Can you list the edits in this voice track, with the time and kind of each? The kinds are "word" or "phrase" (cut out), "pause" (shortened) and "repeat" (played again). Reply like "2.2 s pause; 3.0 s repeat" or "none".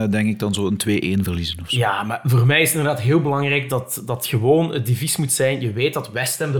none